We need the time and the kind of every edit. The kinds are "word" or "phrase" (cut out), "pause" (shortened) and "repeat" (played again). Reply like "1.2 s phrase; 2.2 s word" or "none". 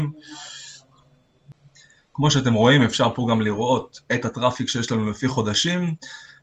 none